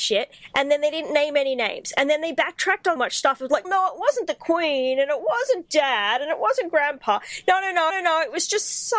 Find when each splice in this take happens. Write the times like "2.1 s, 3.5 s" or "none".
3.0 s, 3.6 s, 7.9 s